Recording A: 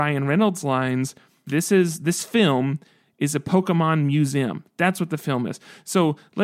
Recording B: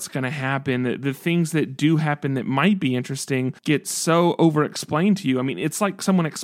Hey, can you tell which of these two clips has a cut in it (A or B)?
B